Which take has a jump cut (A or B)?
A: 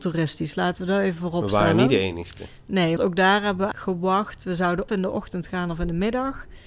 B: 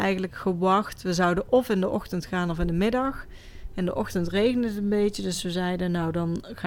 A